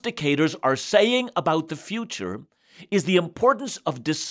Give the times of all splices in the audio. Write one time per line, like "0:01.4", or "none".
none